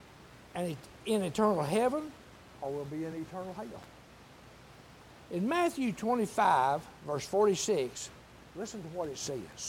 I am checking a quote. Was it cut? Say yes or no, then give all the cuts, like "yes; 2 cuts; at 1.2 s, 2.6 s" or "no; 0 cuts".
no; 0 cuts